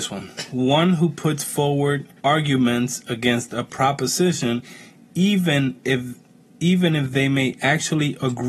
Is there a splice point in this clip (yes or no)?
yes